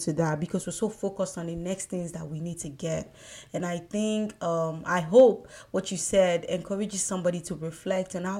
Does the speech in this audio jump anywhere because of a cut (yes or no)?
no